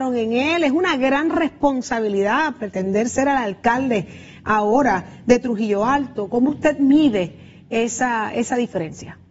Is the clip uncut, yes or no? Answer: yes